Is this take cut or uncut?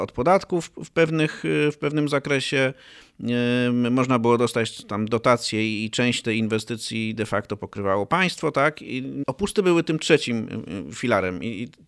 uncut